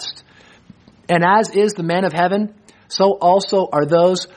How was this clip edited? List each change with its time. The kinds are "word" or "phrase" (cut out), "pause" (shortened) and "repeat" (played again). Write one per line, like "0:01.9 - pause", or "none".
none